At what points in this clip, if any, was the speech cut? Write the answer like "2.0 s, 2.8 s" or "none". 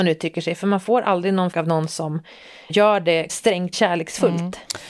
1.5 s, 2.7 s, 3.3 s, 3.7 s